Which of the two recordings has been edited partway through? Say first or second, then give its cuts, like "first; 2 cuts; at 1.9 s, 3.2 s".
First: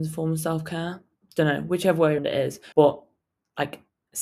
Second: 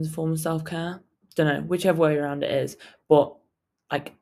first; 2 cuts; at 2.2 s, 2.7 s